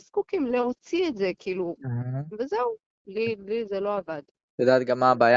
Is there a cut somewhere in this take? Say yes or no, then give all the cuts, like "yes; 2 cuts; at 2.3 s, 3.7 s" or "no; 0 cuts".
no; 0 cuts